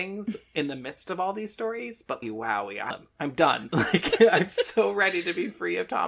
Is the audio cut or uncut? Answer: cut